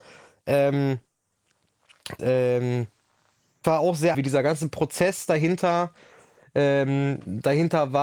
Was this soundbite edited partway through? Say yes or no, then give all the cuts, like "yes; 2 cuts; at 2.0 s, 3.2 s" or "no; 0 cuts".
yes; 3 cuts; at 2.2 s, 3.6 s, 4.1 s